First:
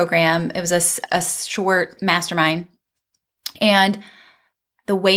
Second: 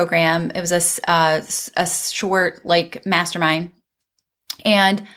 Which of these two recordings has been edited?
first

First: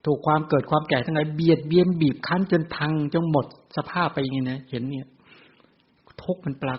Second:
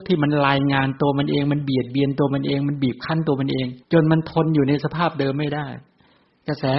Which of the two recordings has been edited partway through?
second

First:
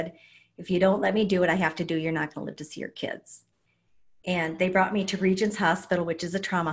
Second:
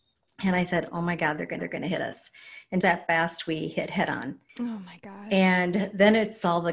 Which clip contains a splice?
second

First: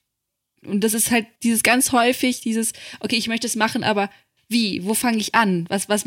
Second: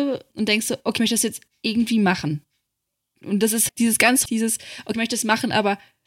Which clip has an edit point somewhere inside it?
second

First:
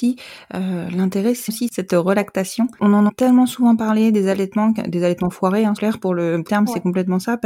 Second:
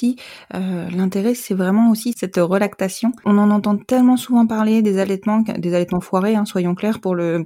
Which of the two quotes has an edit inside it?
first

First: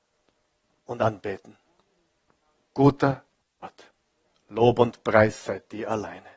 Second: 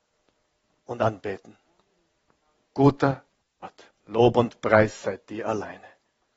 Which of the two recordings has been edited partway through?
second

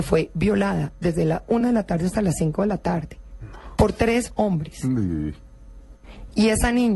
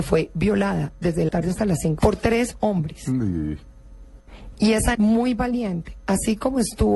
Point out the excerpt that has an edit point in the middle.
second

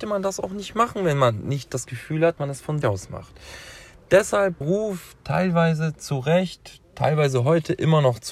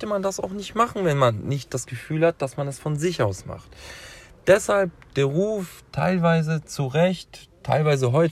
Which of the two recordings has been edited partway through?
first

